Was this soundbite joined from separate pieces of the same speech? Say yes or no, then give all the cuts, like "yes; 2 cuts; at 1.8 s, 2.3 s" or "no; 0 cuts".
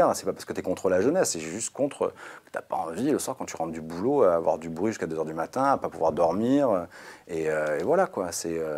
no; 0 cuts